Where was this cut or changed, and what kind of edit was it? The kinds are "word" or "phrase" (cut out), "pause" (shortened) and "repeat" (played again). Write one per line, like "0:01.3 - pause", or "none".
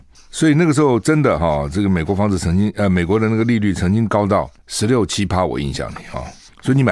none